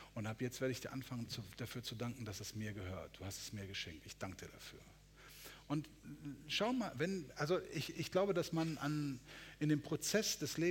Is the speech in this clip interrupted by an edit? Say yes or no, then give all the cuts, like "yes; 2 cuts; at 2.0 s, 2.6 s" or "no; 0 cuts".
no; 0 cuts